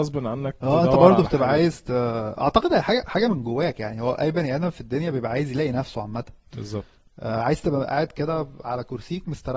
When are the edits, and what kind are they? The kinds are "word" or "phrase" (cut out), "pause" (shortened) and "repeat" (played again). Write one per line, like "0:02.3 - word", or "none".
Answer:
none